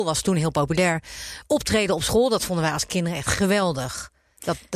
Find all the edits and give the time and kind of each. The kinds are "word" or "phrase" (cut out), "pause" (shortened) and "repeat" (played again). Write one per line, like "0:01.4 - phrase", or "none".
none